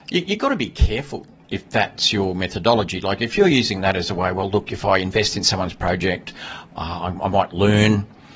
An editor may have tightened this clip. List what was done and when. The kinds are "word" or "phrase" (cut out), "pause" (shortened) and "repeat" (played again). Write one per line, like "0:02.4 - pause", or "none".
none